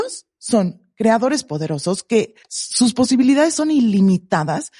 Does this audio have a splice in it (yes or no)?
yes